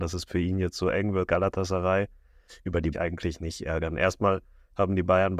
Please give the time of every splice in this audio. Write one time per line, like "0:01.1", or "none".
0:01.3
0:02.9